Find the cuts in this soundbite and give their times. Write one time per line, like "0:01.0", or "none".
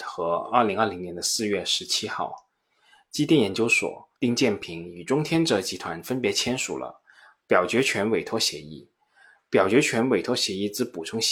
0:04.2